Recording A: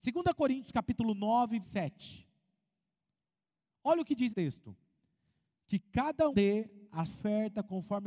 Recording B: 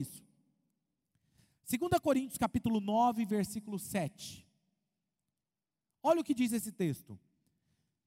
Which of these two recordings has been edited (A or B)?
A